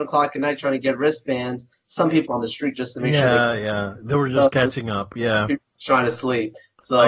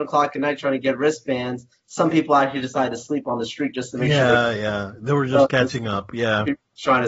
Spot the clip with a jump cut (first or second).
first